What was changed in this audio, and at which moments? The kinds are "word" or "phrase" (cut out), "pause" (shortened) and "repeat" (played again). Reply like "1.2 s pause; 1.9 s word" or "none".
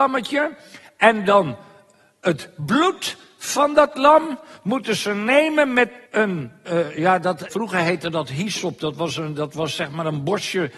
6.1 s pause; 7.5 s word

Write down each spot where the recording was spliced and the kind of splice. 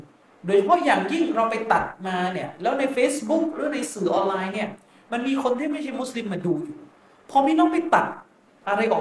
none

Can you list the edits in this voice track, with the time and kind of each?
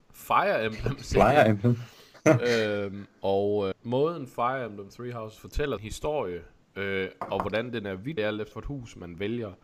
3.7 s word; 5.8 s word; 8.2 s word; 8.5 s word

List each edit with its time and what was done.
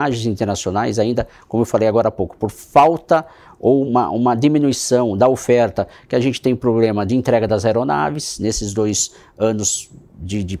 none

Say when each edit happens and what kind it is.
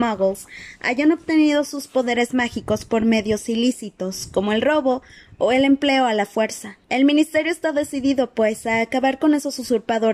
6.8 s pause

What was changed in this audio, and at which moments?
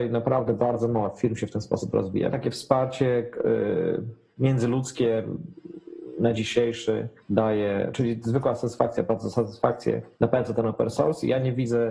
2.3 s phrase; 6.3 s word; 7.2 s pause; 10.1 s pause

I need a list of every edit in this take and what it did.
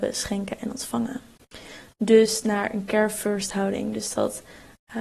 none

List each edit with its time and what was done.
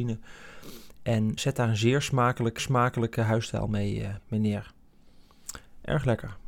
1.4 s word; 2.6 s repeat; 4.2 s word

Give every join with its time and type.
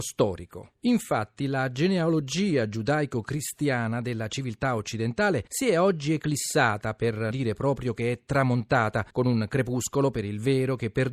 5.5 s pause; 7.3 s word; 9.1 s pause

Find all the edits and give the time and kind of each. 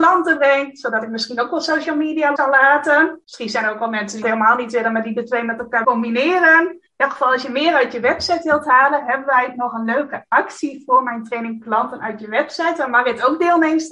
2.4 s word; 3.2 s pause; 4.2 s word; 5.8 s word; 6.9 s pause; 11.6 s word

